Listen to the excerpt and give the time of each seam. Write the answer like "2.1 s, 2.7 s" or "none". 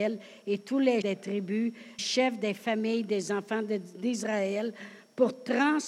1.0 s, 2.0 s